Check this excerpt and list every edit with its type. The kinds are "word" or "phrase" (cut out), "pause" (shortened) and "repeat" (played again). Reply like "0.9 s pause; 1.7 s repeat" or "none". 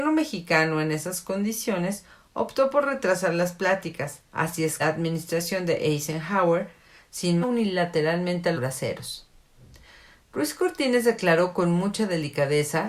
4.3 s pause; 4.8 s phrase; 7.4 s phrase; 8.5 s word